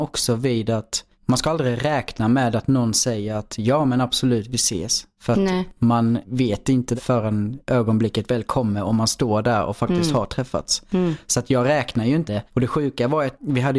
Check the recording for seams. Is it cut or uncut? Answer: cut